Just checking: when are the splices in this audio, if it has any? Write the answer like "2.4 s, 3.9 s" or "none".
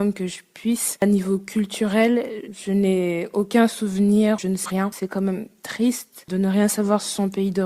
2.5 s, 4.7 s